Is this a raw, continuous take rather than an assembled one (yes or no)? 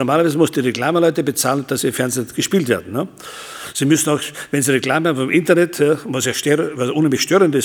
yes